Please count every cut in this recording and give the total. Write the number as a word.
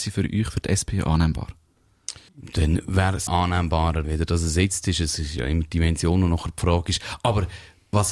three